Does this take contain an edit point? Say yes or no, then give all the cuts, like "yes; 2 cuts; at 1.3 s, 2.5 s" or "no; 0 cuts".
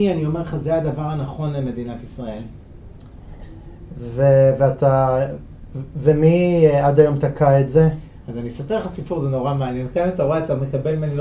no; 0 cuts